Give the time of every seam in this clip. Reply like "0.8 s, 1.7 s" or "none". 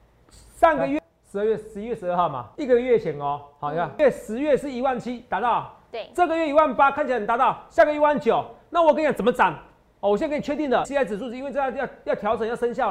2.5 s, 10.8 s